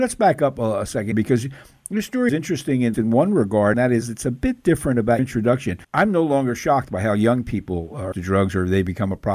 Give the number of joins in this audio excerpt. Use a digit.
7